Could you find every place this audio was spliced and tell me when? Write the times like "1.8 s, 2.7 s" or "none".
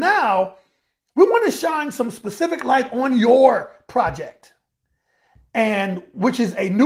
none